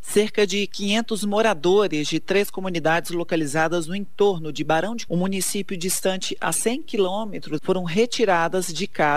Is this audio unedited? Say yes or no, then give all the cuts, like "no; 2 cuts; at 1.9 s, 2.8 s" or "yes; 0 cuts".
no; 2 cuts; at 5.1 s, 7.6 s